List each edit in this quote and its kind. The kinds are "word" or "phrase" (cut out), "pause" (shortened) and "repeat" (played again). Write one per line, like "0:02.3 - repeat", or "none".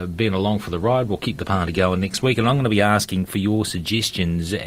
none